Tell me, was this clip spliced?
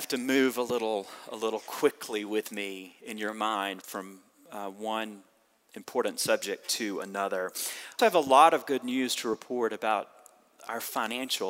yes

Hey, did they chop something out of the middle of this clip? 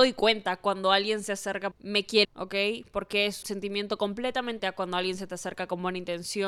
yes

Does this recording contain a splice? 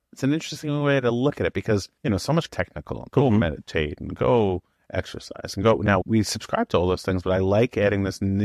yes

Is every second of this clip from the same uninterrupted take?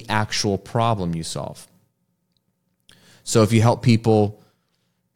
yes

